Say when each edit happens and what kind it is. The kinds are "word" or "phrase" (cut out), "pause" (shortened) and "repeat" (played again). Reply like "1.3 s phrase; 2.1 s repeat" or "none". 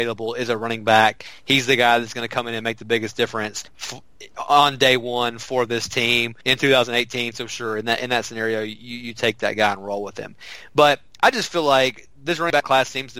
3.7 s pause; 6.4 s pause